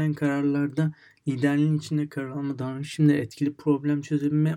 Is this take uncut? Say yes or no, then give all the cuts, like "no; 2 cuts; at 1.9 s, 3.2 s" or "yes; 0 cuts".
yes; 0 cuts